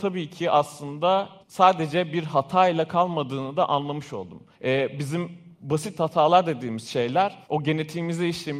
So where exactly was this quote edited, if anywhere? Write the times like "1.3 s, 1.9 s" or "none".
1.4 s, 4.5 s, 5.5 s, 7.4 s